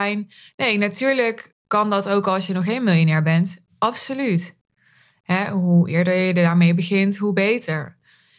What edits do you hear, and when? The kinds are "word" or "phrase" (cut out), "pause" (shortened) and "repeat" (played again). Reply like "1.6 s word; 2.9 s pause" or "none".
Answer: 1.6 s pause